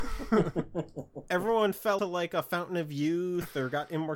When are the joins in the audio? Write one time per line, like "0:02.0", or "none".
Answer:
0:02.0